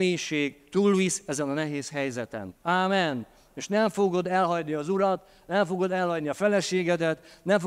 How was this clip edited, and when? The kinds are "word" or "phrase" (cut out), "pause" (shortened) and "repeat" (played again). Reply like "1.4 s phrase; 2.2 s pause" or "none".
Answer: 2.6 s pause